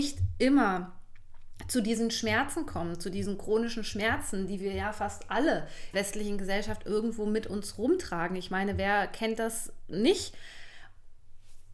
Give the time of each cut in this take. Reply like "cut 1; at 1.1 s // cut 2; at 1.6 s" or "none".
cut 1; at 5.9 s

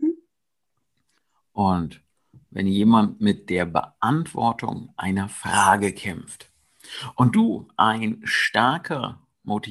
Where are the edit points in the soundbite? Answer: none

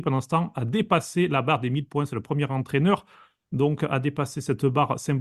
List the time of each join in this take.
none

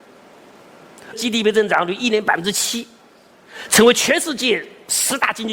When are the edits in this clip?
cut 1; at 1.1 s

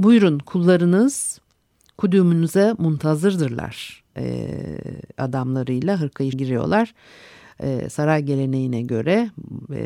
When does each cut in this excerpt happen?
cut 1; at 4.1 s // cut 2; at 6.3 s

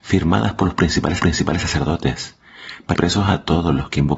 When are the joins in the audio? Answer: cut 1; at 1.2 s // cut 2; at 2.9 s

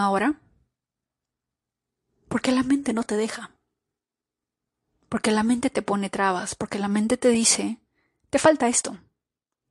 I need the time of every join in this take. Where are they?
none

